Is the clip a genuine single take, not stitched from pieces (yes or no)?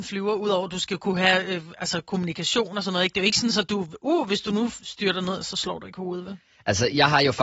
yes